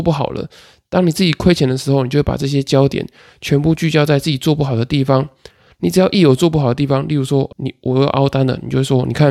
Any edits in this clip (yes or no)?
yes